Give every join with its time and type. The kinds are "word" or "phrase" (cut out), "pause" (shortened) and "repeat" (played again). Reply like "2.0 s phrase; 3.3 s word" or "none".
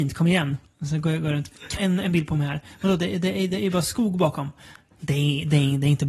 1.8 s phrase